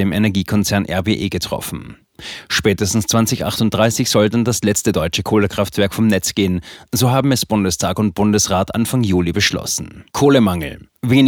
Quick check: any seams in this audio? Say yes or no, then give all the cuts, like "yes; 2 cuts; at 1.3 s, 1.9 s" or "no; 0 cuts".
yes; 1 cut; at 10.1 s